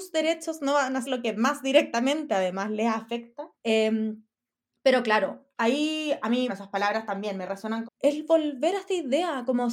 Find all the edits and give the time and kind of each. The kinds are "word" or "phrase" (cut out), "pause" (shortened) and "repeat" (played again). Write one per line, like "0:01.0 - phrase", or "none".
0:01.0 - word
0:03.5 - pause
0:05.5 - pause
0:06.5 - word
0:07.8 - phrase